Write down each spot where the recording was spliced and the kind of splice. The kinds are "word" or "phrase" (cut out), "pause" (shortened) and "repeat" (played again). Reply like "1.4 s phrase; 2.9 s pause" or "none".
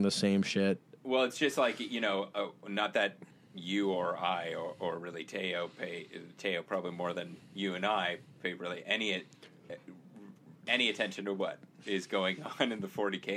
3.3 s pause; 10.4 s pause

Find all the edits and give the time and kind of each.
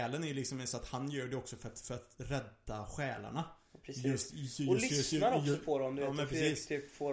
none

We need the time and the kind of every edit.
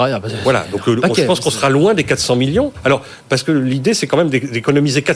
none

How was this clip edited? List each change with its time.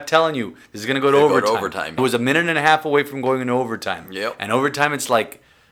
2.0 s word

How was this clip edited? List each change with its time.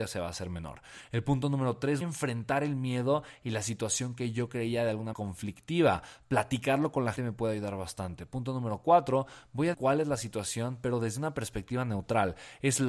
2.0 s word; 5.1 s word; 7.2 s word; 9.7 s word

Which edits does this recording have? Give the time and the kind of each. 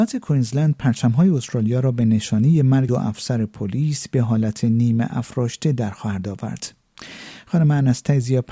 2.9 s word

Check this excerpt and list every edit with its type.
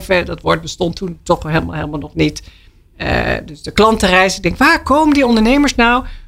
none

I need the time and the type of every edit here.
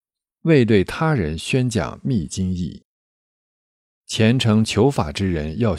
none

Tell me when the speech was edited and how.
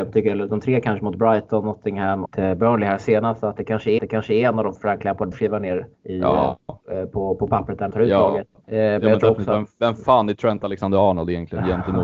2.3 s phrase; 4.0 s repeat; 4.8 s phrase; 5.3 s word; 5.9 s pause; 6.8 s pause; 7.9 s word; 8.6 s pause

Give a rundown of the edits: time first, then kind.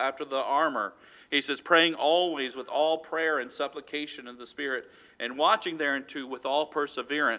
none

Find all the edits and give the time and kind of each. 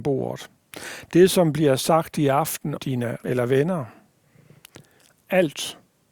2.8 s word; 3.2 s word

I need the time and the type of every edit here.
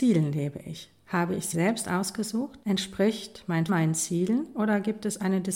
1.5 s word; 2.6 s pause; 3.7 s word

